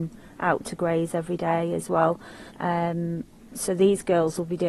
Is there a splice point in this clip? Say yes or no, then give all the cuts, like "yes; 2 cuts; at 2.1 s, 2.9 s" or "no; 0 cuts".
yes; 1 cut; at 2.5 s